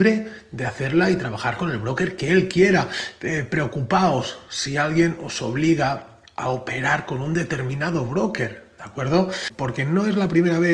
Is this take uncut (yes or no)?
yes